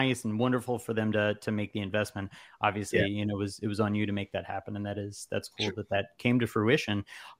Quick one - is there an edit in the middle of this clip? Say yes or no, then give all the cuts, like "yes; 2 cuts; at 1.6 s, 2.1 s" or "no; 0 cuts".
no; 0 cuts